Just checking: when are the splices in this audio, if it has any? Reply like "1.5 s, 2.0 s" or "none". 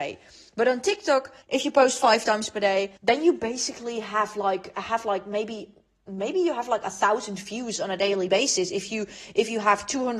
1.4 s, 3.0 s